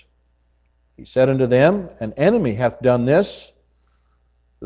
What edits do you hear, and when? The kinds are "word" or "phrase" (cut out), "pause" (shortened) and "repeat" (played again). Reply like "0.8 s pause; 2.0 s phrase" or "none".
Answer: none